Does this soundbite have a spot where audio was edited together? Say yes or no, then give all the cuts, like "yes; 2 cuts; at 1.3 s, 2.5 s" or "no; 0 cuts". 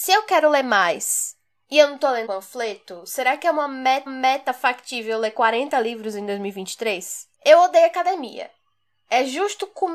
yes; 2 cuts; at 2.3 s, 4.1 s